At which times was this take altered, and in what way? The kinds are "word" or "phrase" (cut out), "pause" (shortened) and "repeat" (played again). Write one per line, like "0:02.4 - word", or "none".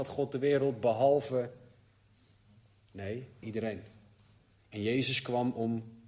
0:03.4 - phrase